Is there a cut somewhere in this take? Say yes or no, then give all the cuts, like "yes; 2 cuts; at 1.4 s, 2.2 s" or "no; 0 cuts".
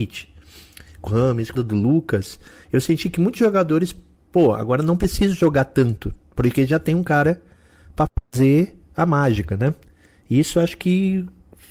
yes; 2 cuts; at 1.1 s, 1.6 s